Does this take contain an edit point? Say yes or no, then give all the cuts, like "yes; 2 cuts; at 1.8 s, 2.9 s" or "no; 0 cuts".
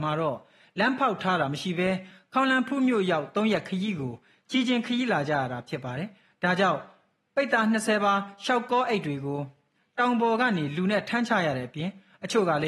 no; 0 cuts